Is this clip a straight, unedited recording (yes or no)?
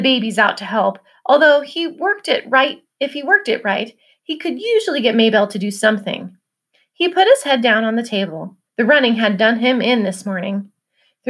no